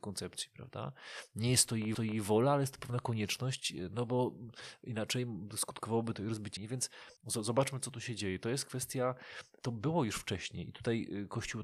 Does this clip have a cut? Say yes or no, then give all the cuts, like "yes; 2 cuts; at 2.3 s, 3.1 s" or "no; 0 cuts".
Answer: yes; 3 cuts; at 1.9 s, 6.6 s, 7.2 s